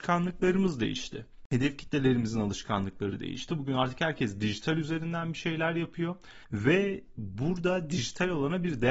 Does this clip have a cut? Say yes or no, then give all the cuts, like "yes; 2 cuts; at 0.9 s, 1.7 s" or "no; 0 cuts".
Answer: yes; 1 cut; at 6.4 s